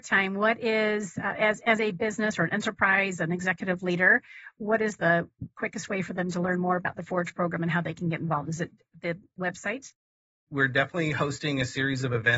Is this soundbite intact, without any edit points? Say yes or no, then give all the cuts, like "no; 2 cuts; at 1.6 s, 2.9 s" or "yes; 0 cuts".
yes; 0 cuts